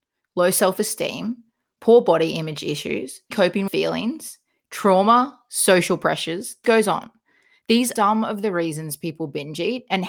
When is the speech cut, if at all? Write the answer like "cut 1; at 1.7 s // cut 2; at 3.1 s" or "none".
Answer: cut 1; at 3.3 s // cut 2; at 3.7 s // cut 3; at 6.6 s // cut 4; at 8.0 s